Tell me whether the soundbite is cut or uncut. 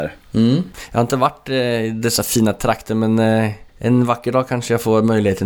cut